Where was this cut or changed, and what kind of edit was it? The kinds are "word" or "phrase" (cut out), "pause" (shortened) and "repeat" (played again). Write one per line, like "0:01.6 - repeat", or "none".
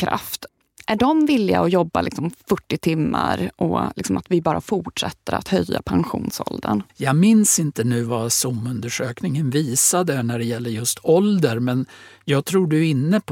0:06.9 - pause